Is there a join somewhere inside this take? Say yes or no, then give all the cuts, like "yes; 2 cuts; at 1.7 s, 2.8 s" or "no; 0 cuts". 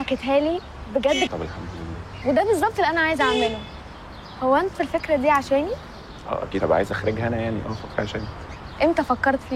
yes; 4 cuts; at 1.3 s, 4.7 s, 6.6 s, 7.9 s